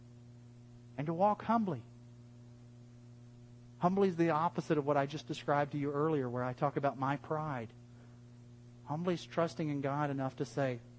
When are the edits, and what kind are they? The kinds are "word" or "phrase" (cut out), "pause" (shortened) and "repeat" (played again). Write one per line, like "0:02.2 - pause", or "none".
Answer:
none